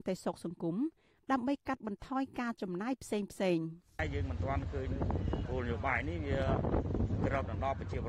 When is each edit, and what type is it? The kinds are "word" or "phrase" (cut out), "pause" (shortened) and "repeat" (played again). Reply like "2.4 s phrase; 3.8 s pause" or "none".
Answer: none

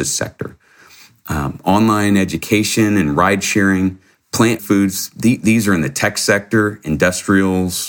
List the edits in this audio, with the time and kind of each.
4.6 s phrase

